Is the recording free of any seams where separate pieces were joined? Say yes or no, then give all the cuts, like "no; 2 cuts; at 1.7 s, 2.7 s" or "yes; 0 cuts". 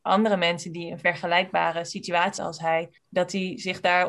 no; 2 cuts; at 2.4 s, 3.0 s